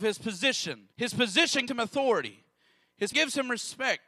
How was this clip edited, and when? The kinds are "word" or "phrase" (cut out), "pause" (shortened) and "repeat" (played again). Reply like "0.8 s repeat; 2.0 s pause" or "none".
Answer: 0.9 s pause; 1.7 s word; 3.1 s word